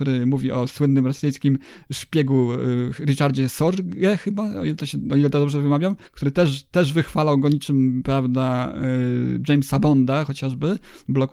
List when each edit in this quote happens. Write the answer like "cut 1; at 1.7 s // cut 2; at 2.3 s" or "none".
cut 1; at 6.1 s